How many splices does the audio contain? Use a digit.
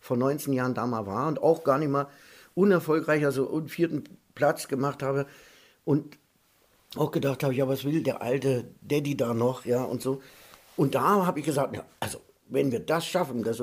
0